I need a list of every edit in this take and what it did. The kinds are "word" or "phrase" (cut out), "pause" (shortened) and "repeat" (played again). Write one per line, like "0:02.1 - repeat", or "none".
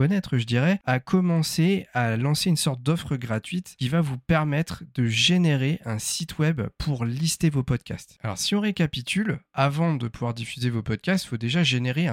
none